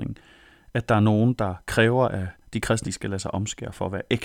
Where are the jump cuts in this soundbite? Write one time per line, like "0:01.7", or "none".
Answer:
0:02.8